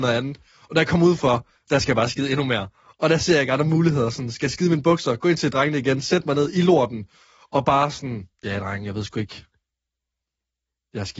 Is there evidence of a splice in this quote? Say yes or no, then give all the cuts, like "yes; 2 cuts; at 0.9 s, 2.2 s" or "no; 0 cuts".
no; 0 cuts